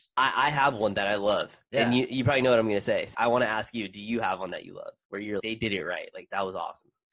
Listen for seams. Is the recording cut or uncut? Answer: cut